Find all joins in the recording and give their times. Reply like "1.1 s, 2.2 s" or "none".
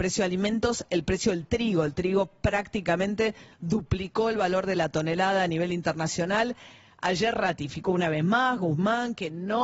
none